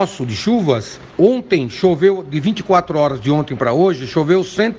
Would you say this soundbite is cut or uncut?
uncut